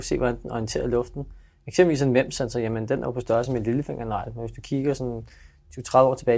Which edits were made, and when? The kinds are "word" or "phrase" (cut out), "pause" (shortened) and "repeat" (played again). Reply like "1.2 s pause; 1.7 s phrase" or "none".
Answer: none